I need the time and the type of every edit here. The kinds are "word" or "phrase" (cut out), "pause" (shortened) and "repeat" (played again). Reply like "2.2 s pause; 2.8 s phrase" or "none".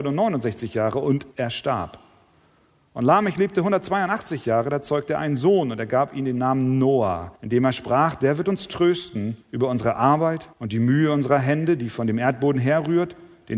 1.3 s pause; 7.4 s pause; 9.4 s pause; 10.5 s pause